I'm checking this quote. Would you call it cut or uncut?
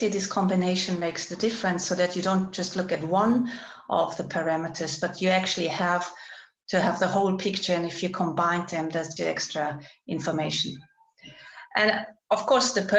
cut